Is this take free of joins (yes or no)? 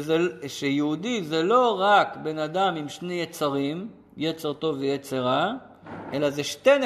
yes